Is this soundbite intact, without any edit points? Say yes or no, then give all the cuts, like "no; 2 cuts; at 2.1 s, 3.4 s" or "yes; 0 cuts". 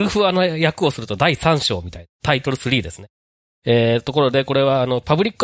yes; 0 cuts